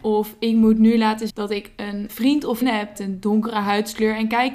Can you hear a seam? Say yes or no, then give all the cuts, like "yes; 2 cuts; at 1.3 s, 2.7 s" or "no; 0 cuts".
yes; 4 cuts; at 1.3 s, 2.1 s, 2.6 s, 3.0 s